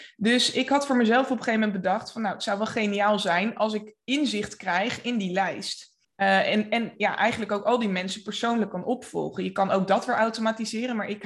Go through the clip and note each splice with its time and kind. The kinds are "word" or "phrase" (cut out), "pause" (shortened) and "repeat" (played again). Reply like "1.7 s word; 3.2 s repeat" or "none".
6.0 s pause